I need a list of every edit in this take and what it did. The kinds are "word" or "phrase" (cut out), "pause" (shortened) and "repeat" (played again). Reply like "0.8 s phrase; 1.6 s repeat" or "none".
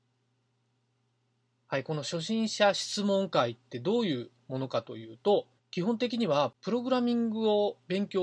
5.6 s pause